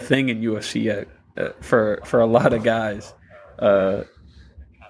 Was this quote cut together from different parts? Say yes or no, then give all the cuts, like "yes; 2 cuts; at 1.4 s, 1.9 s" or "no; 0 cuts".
no; 0 cuts